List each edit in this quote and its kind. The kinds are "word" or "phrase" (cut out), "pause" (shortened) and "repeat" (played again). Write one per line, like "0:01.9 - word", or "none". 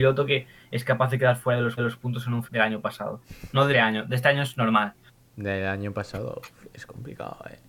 0:01.8 - repeat
0:02.4 - word
0:03.7 - word
0:05.1 - pause